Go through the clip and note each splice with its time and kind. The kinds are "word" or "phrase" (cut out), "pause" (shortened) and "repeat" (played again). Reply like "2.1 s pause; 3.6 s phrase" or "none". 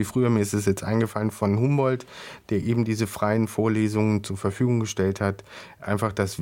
none